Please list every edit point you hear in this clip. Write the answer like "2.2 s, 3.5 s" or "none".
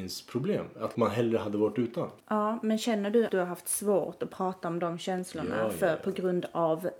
0.9 s, 2.2 s, 3.3 s